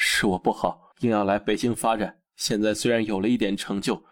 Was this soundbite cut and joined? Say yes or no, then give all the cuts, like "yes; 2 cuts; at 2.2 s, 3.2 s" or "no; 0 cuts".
yes; 2 cuts; at 0.9 s, 2.3 s